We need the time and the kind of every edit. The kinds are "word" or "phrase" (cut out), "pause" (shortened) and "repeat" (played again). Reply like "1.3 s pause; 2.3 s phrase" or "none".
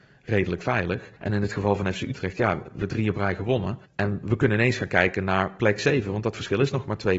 1.2 s pause; 2.8 s word; 3.8 s pause